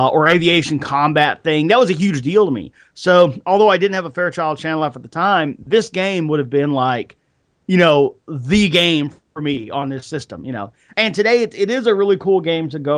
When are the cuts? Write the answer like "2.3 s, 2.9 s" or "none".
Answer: none